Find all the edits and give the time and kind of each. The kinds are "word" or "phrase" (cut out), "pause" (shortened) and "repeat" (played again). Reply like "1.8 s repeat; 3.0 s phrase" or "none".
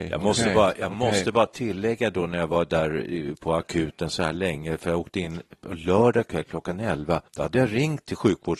7.3 s pause